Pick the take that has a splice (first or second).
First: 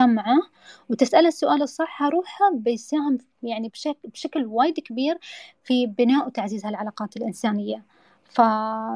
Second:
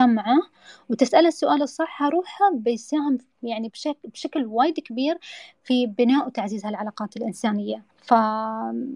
second